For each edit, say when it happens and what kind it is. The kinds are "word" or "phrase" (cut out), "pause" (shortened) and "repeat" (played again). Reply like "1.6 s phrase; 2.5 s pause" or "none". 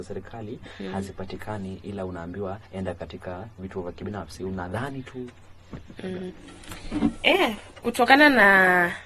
2.7 s pause